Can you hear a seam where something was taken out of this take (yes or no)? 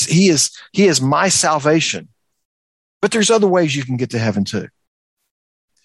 no